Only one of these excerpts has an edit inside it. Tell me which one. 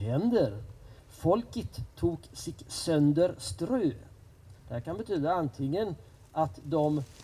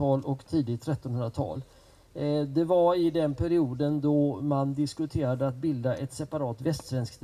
first; 1 cut; at 4.6 s

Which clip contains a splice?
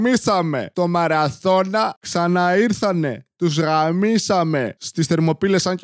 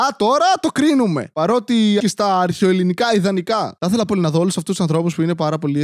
second; 2 cuts; at 2.0 s, 4.1 s

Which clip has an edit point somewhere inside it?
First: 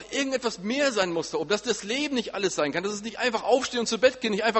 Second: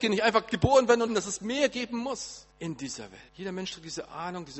second; 3 cuts; at 1.1 s, 2.5 s, 3.3 s

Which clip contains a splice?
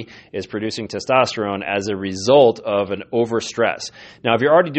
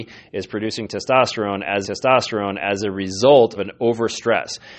second; 2 cuts; at 1.8 s, 3.6 s

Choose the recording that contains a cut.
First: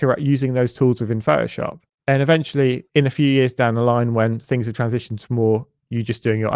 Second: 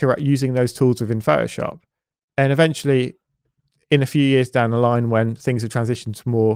first; 2 cuts; at 1.9 s, 2.9 s

